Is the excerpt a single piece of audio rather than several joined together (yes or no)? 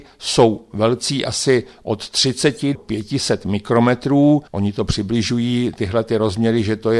no